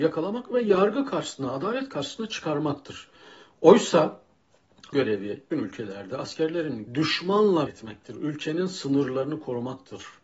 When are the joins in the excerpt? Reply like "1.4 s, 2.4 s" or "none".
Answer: 4.9 s, 5.5 s, 6.9 s, 7.7 s